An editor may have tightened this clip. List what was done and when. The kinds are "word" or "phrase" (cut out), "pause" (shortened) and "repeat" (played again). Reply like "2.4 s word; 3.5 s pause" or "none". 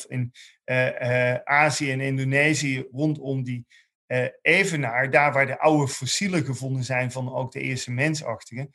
none